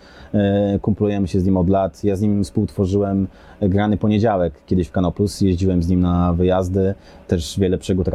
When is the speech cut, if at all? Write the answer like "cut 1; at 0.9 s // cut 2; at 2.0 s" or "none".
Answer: none